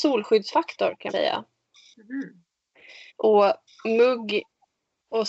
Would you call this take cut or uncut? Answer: cut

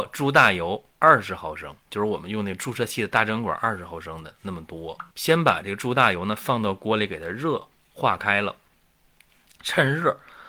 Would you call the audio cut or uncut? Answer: cut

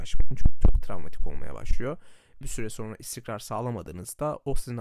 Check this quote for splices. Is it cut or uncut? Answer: cut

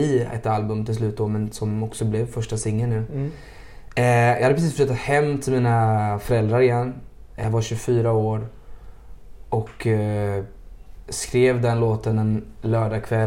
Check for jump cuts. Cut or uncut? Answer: uncut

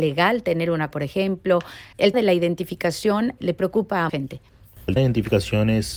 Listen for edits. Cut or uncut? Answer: cut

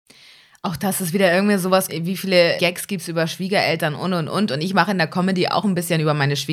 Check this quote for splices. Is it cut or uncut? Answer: cut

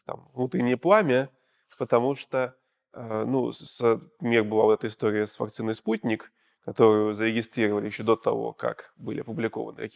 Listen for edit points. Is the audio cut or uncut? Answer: uncut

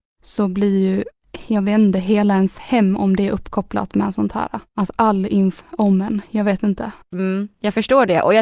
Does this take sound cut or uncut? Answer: cut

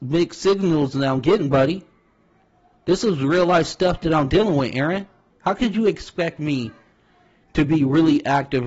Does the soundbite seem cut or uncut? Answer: uncut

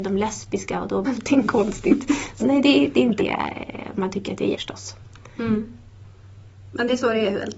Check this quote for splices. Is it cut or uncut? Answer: cut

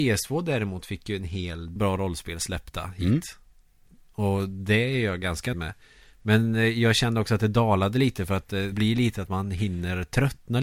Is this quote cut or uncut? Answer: cut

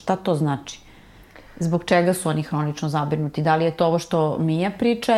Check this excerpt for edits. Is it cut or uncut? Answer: uncut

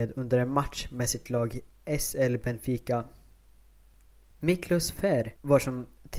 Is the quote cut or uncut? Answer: uncut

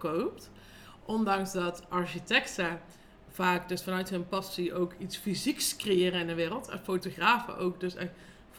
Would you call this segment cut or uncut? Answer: cut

